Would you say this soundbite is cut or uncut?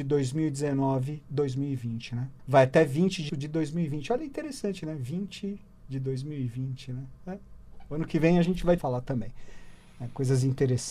cut